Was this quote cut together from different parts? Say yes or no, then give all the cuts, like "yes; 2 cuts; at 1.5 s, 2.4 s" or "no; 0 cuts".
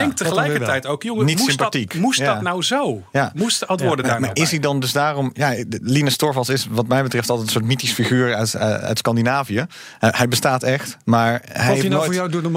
yes; 1 cut; at 3.8 s